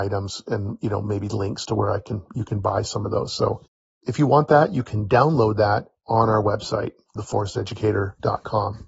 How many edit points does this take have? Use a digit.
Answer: 0